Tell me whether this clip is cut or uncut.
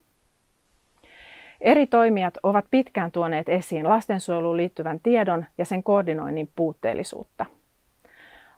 uncut